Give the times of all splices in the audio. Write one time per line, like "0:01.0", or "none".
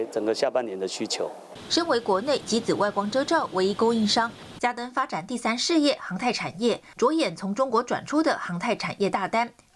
0:02.4